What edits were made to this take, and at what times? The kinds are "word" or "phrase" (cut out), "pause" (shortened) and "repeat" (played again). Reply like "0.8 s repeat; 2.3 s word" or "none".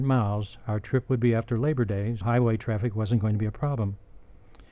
2.2 s word